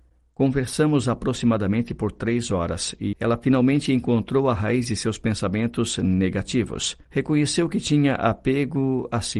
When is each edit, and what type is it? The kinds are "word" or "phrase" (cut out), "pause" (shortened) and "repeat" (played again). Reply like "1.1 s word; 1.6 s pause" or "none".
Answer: 3.1 s word